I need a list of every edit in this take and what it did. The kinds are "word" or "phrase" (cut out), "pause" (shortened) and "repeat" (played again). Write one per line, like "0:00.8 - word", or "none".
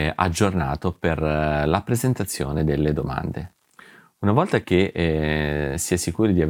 none